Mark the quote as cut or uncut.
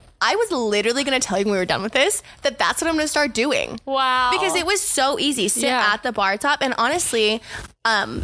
uncut